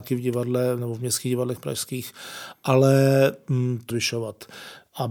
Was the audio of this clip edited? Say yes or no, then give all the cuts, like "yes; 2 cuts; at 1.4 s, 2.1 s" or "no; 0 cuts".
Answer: yes; 1 cut; at 3.9 s